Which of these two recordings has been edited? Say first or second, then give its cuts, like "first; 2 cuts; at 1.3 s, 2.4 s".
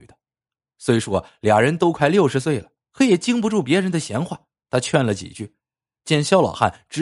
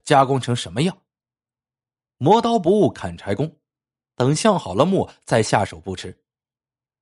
first; 2 cuts; at 2.8 s, 4.6 s